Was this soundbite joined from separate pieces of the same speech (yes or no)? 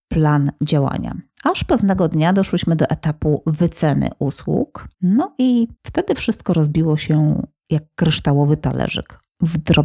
yes